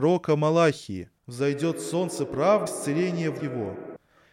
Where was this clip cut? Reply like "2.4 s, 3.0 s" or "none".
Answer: 1.2 s, 2.7 s, 3.4 s